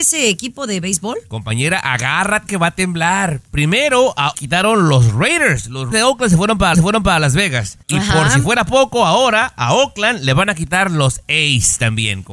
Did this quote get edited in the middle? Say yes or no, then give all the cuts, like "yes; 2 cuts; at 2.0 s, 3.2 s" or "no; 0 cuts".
yes; 5 cuts; at 2.5 s, 4.3 s, 5.9 s, 6.7 s, 7.8 s